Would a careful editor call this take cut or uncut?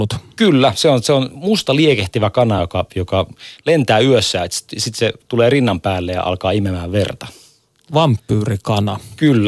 uncut